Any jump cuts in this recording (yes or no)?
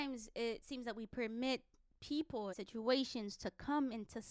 yes